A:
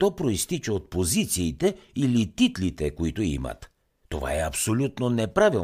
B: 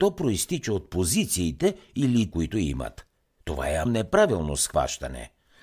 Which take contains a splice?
B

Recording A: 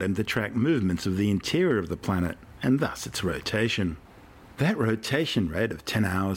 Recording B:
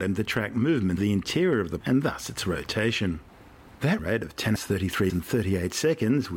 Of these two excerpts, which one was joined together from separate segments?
B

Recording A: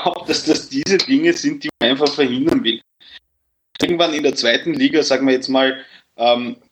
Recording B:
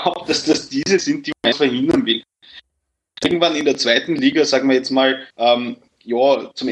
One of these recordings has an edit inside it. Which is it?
B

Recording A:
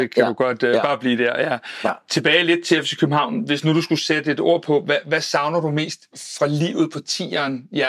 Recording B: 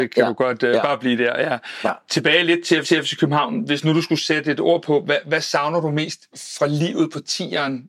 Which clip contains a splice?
B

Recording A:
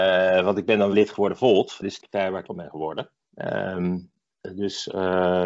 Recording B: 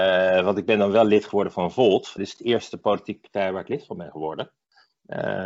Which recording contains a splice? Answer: A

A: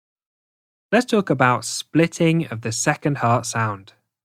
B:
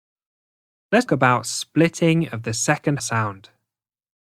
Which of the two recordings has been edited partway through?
B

